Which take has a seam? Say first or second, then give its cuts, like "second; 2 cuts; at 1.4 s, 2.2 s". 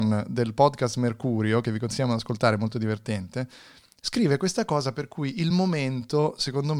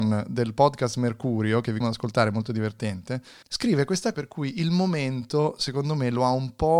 second; 3 cuts; at 1.8 s, 3.4 s, 4.1 s